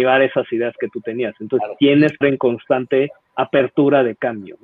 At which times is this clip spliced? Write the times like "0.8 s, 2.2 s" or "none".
2.2 s